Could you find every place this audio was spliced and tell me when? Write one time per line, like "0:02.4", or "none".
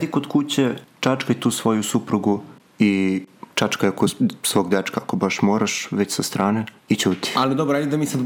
0:06.8